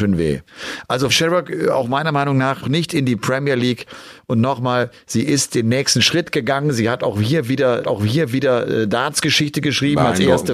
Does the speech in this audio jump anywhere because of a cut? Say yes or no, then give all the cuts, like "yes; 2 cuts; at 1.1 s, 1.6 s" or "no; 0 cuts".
yes; 3 cuts; at 1.1 s, 2.6 s, 7.8 s